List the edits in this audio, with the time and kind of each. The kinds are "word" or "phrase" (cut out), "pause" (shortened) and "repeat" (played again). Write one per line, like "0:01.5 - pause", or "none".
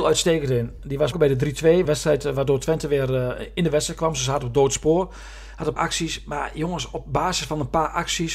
0:01.1 - word
0:01.9 - phrase
0:05.8 - phrase